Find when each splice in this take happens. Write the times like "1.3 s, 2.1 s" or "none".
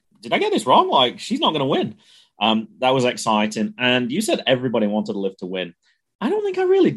none